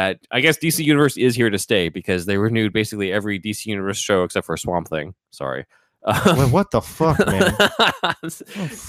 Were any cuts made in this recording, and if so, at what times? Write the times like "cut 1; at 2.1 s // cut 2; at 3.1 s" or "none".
none

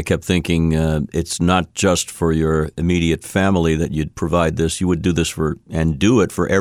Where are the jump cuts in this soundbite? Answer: cut 1; at 4.1 s

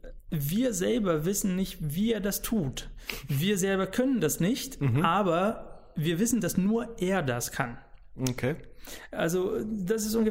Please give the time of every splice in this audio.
none

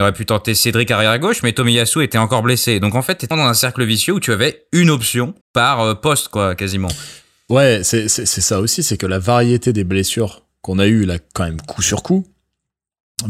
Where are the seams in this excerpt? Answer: cut 1; at 3.3 s // cut 2; at 5.4 s

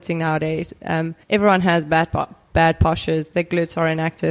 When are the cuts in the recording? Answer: cut 1; at 1.2 s

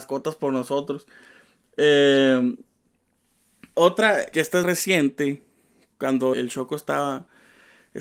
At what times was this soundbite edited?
cut 1; at 3.7 s // cut 2; at 4.3 s // cut 3; at 4.6 s // cut 4; at 6.3 s

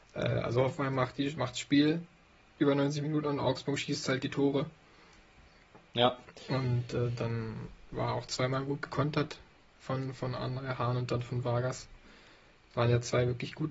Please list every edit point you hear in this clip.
none

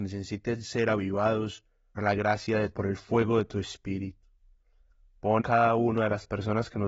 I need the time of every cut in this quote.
cut 1; at 2.0 s // cut 2; at 2.7 s // cut 3; at 5.4 s

